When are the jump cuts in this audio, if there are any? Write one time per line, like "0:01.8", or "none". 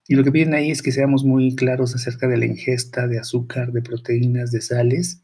none